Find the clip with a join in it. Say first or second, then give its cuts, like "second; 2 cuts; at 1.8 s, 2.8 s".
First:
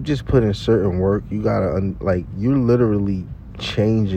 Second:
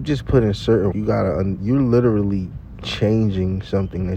second; 2 cuts; at 0.9 s, 1.6 s